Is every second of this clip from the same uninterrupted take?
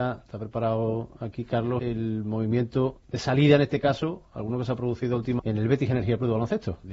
no; 3 cuts; at 1.8 s, 3.0 s, 5.4 s

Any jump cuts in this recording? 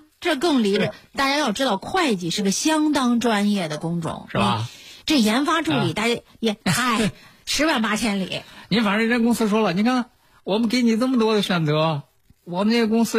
yes; 1 cut; at 6.6 s

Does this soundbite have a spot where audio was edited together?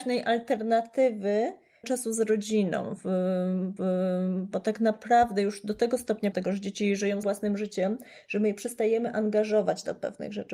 yes; 4 cuts; at 1.8 s, 3.8 s, 6.3 s, 7.2 s

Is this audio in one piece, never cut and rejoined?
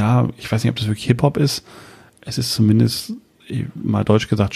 yes; 0 cuts

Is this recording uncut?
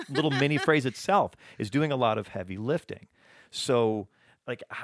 yes; 0 cuts

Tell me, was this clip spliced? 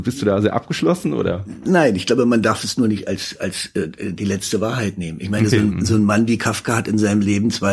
no; 0 cuts

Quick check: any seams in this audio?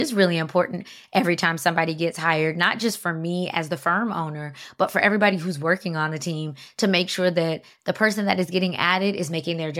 no; 0 cuts

